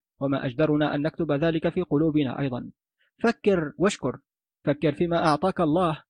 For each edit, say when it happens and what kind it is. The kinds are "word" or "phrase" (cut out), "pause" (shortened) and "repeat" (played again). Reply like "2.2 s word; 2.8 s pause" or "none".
none

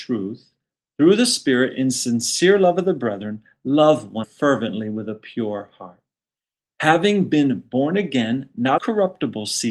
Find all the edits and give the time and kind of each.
4.2 s word; 8.8 s word

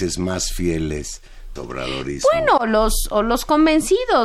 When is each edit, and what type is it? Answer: 1.6 s phrase

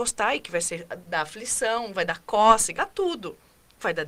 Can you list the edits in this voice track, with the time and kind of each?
1.1 s word; 2.8 s word

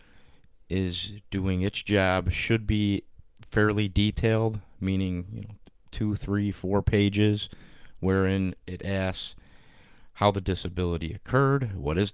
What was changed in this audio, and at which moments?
none

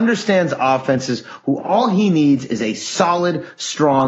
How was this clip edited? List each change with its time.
none

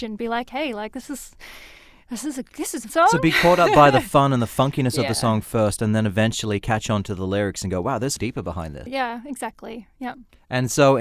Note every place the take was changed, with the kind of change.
2.9 s word; 8.2 s word; 8.9 s word

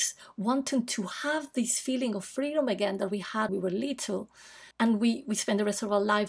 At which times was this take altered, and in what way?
3.5 s word; 4.7 s pause

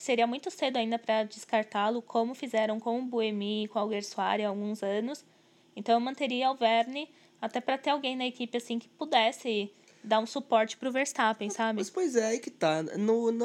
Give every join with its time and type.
none

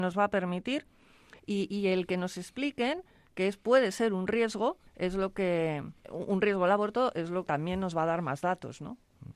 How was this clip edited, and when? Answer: 1.4 s pause; 4.9 s pause; 6.0 s pause; 7.5 s word

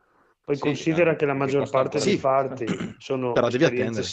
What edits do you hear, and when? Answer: 2.2 s word

